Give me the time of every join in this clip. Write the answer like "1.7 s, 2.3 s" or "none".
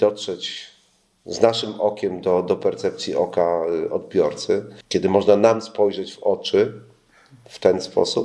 none